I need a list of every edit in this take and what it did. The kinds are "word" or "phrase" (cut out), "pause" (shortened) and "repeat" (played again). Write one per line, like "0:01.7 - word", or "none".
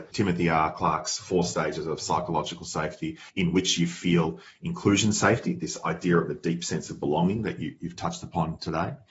0:03.3 - pause